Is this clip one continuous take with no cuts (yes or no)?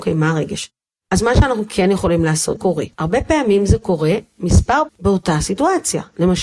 no